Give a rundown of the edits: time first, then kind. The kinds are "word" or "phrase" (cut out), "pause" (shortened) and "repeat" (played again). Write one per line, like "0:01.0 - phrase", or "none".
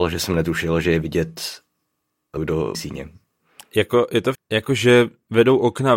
0:02.4 - word
0:02.7 - word
0:04.3 - word